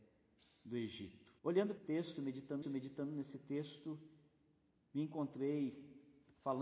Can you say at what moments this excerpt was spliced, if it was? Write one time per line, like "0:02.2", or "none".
0:01.4
0:01.8
0:02.6